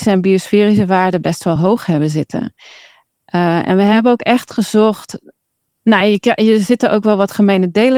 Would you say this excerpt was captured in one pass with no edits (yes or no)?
yes